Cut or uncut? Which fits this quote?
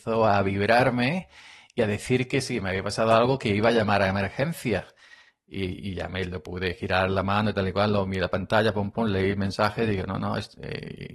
uncut